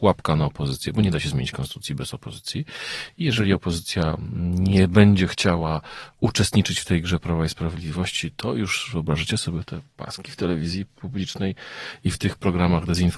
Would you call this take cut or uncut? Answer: uncut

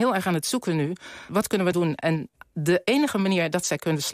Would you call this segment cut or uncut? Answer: cut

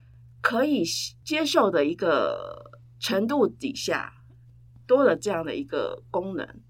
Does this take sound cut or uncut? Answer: uncut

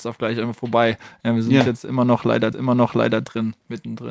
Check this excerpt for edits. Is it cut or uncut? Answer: cut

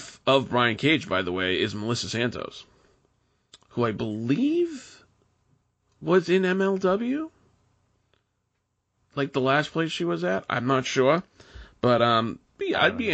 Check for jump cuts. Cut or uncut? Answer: uncut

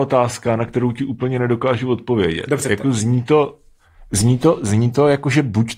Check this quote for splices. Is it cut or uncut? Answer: uncut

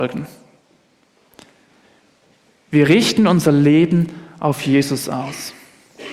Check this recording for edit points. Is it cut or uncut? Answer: uncut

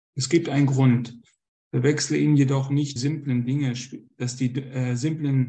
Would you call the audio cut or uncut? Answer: cut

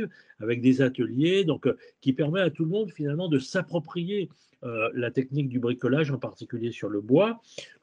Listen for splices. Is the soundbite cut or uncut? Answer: uncut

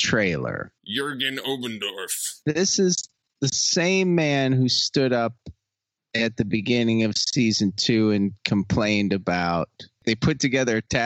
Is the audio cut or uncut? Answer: uncut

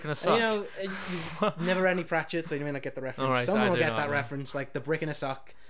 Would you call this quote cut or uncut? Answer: uncut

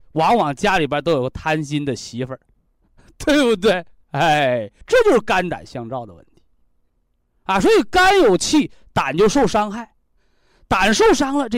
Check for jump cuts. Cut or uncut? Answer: cut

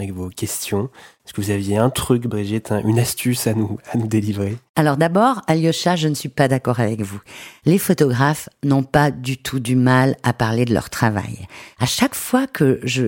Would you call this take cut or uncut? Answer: uncut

